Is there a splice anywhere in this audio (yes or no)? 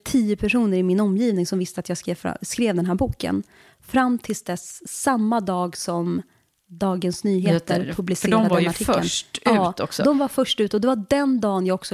no